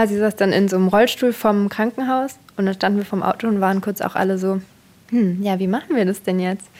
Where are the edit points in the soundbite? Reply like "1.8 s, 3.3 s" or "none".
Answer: none